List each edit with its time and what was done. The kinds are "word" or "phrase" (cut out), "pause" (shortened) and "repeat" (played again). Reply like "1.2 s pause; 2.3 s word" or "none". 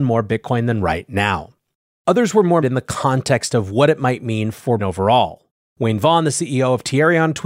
2.6 s word; 4.8 s word